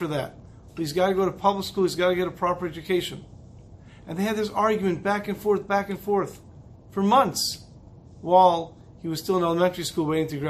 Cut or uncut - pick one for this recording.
uncut